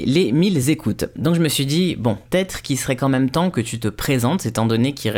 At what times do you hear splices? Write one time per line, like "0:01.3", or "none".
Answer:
0:02.2